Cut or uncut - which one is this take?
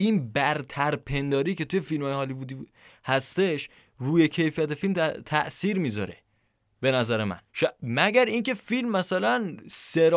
cut